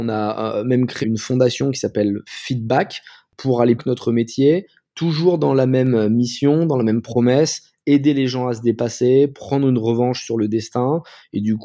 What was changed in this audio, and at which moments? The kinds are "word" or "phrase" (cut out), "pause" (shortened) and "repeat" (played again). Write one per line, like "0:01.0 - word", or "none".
0:01.0 - word
0:03.8 - phrase